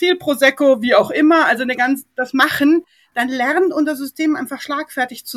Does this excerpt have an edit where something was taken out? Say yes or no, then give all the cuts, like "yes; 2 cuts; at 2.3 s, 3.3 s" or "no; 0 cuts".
no; 0 cuts